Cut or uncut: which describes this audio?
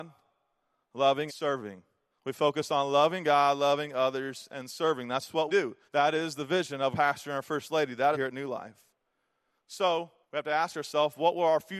cut